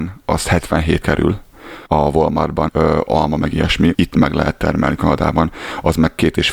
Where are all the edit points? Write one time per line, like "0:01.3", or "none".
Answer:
0:01.0
0:01.9
0:02.7
0:03.1
0:03.9